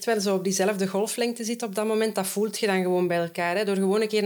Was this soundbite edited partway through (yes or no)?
no